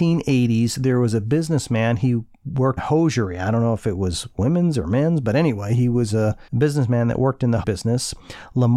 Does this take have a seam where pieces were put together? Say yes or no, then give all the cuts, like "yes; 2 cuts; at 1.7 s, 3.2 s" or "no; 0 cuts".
yes; 3 cuts; at 2.8 s, 6.5 s, 7.6 s